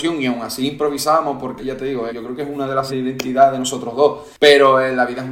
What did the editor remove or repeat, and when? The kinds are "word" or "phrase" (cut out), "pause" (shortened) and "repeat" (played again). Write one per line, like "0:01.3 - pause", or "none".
0:01.6 - word
0:02.1 - word
0:02.9 - word